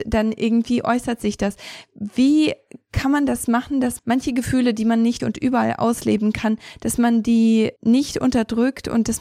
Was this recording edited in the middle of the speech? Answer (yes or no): yes